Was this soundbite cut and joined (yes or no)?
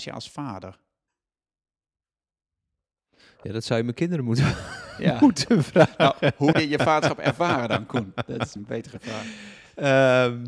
yes